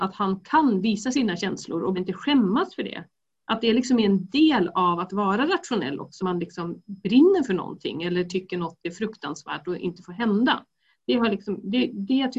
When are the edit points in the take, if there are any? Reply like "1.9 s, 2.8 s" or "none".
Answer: 1.9 s, 6.2 s